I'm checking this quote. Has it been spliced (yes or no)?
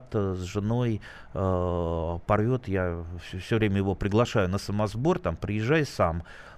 no